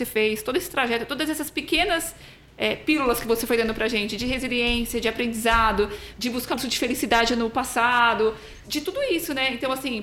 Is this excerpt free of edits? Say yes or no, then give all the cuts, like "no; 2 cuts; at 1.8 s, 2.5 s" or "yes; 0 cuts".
no; 2 cuts; at 6.5 s, 8.6 s